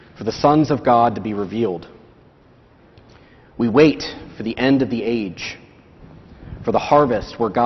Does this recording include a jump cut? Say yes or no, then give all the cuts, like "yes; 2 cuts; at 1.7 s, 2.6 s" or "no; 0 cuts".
no; 0 cuts